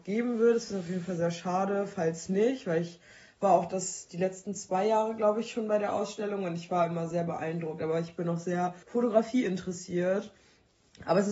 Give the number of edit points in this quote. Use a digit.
1